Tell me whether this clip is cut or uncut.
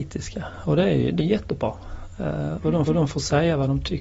cut